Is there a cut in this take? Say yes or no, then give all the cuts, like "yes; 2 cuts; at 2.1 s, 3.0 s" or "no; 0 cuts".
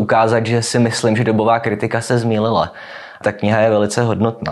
yes; 1 cut; at 3.2 s